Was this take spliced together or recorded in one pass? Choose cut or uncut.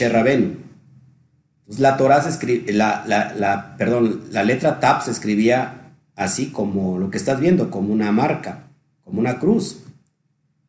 uncut